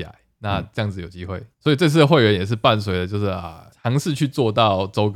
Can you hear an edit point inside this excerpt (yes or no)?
yes